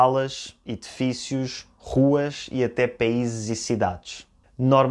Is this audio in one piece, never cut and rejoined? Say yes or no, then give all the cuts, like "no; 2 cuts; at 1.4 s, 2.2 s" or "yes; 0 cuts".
yes; 0 cuts